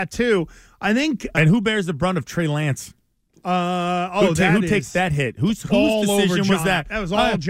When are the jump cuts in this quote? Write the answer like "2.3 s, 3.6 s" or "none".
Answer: 1.3 s